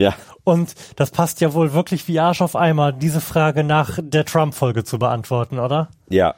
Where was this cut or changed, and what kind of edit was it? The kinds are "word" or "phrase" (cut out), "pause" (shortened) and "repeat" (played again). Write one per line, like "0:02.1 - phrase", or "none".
none